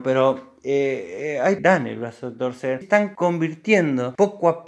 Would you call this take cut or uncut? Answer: cut